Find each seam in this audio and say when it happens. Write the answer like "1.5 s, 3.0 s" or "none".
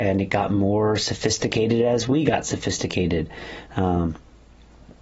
none

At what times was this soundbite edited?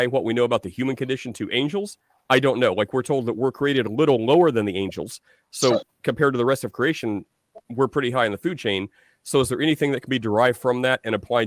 none

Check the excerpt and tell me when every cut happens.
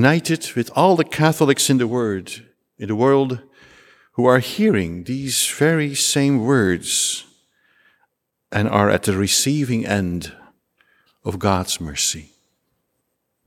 none

